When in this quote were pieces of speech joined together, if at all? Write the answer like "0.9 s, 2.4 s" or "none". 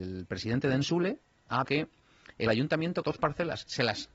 1.6 s, 2.5 s, 3.0 s